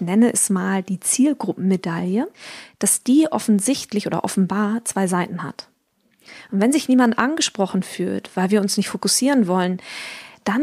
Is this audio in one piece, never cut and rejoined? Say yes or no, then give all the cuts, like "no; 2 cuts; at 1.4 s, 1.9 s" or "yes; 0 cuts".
yes; 0 cuts